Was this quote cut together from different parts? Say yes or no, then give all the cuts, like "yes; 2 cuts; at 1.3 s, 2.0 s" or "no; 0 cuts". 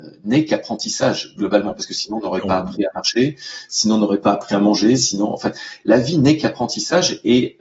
no; 0 cuts